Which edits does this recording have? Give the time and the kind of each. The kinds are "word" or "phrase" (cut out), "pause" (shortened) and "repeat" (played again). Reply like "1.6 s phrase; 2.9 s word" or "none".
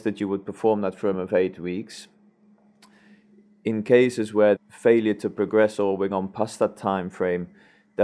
1.1 s word; 4.6 s word; 6.1 s word